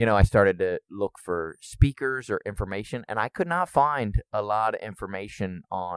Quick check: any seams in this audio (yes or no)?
no